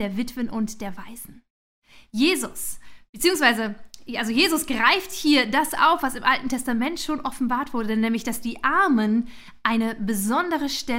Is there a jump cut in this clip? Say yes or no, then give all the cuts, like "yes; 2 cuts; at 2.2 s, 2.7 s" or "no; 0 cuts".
no; 0 cuts